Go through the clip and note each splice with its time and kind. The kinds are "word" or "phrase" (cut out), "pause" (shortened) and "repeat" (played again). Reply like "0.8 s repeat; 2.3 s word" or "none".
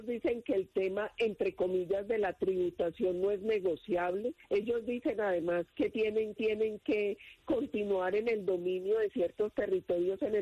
4.4 s pause; 6.4 s repeat